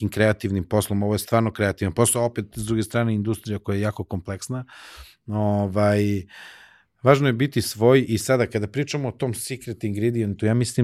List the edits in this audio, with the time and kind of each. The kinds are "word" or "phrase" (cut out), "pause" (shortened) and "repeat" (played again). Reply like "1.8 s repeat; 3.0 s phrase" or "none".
none